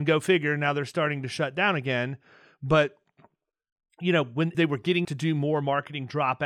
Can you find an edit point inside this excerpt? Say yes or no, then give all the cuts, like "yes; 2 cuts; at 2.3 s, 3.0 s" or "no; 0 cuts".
yes; 2 cuts; at 4.5 s, 5.0 s